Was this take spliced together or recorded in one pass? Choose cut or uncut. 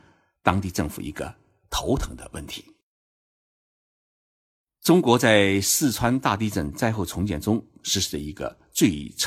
uncut